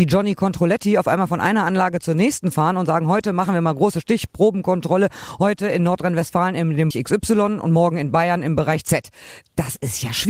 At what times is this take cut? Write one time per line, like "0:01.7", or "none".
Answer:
0:06.9